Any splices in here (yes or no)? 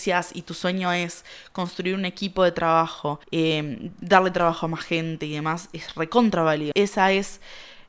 yes